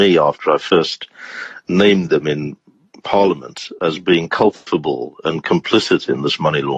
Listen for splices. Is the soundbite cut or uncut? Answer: uncut